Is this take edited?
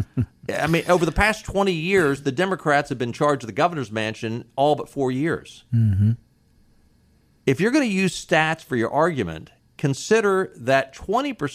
no; 0 cuts

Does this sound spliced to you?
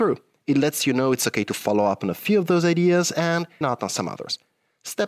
yes; 1 cut; at 3.6 s

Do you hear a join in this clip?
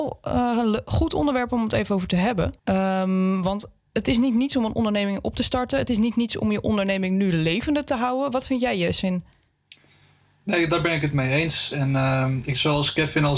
yes; 1 cut; at 2.6 s

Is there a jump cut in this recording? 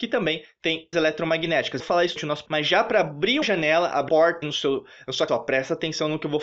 yes; 8 cuts; at 0.9 s, 1.8 s, 2.2 s, 2.5 s, 3.4 s, 4.1 s, 4.4 s, 5.3 s

